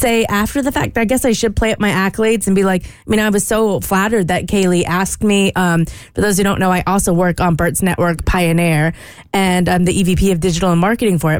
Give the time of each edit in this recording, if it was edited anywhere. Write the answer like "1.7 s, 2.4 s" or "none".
none